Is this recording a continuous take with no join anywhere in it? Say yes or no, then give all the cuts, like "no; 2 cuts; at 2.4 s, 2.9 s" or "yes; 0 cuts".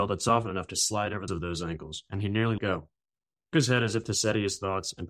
no; 3 cuts; at 1.3 s, 2.6 s, 3.5 s